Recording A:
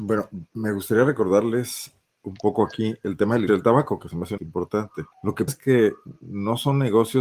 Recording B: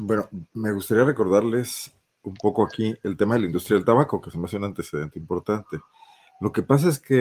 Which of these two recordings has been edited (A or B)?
A